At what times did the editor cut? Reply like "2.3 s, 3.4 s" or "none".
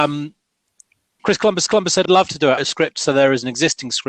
1.2 s, 1.7 s, 2.1 s, 2.6 s